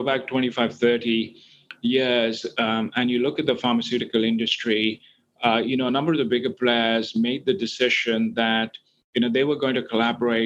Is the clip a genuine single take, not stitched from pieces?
yes; 0 cuts

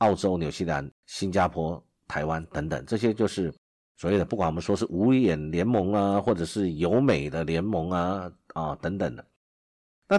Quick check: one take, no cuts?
no; 1 cut; at 1.0 s

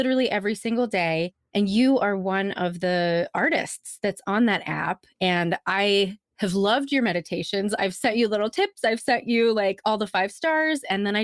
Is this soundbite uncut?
yes; 0 cuts

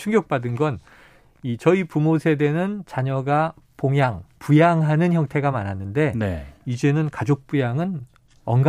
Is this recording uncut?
yes; 0 cuts

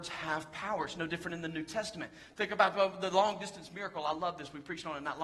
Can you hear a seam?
no; 0 cuts

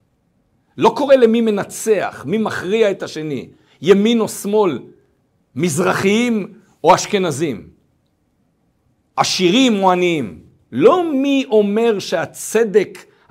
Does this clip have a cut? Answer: no; 0 cuts

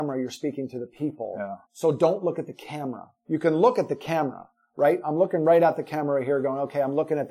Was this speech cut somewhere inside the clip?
yes; 2 cuts; at 1.7 s, 3.2 s

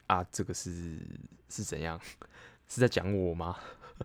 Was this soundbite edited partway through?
yes; 2 cuts; at 1.4 s, 2.6 s

